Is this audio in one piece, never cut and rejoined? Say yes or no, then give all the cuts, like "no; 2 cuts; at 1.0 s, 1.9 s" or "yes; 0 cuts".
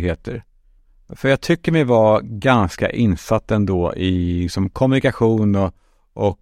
yes; 0 cuts